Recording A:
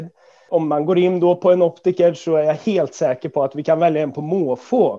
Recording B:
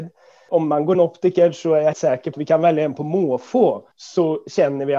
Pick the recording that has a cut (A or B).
B